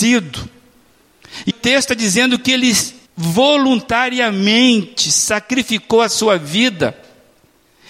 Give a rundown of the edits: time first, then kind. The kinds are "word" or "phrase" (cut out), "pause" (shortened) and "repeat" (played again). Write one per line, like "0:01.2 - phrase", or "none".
0:01.5 - word
0:03.1 - pause